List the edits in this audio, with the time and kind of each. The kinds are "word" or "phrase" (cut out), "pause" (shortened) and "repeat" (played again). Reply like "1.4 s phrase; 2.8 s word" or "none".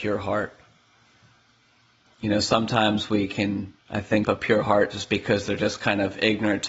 3.8 s pause; 4.2 s phrase